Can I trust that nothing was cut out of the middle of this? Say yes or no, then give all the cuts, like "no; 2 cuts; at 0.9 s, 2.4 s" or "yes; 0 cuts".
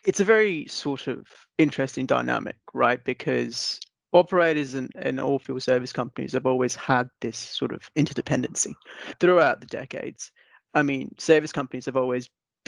yes; 0 cuts